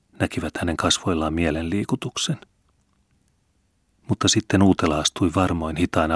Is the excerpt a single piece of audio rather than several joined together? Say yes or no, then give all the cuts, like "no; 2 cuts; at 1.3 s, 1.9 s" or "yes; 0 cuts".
yes; 0 cuts